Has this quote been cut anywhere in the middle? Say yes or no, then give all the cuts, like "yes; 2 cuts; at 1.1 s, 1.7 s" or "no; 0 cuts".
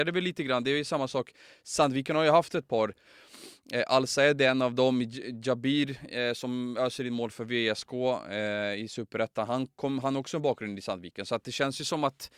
no; 0 cuts